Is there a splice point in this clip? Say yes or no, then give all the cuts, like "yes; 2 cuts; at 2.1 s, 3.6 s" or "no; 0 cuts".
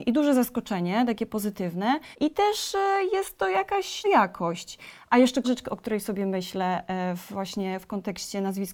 yes; 3 cuts; at 2.1 s, 4.0 s, 5.4 s